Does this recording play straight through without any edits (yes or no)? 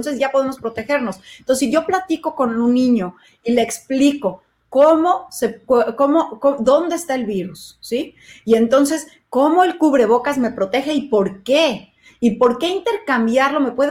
yes